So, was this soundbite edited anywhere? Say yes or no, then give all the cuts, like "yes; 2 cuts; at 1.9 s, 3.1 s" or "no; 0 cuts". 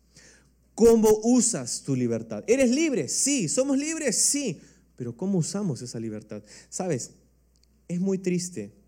no; 0 cuts